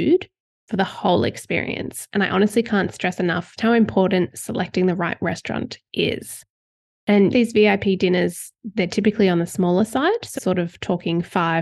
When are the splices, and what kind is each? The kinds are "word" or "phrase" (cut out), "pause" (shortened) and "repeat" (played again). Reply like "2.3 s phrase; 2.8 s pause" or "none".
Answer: 3.6 s word; 5.9 s pause; 7.3 s phrase; 10.4 s word